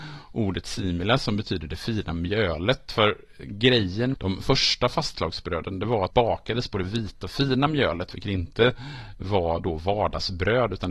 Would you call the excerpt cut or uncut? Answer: cut